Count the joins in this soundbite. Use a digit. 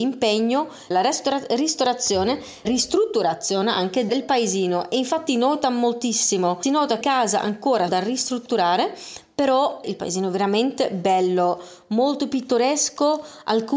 8